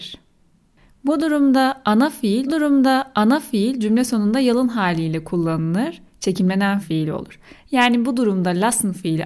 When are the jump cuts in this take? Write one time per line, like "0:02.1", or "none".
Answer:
0:02.5
0:06.8